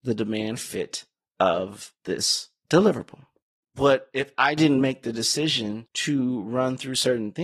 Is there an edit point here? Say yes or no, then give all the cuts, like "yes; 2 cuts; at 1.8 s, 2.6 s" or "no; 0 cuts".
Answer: no; 0 cuts